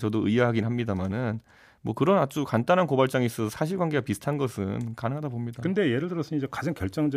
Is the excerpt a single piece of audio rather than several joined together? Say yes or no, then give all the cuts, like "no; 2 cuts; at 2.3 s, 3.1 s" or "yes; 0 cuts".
yes; 0 cuts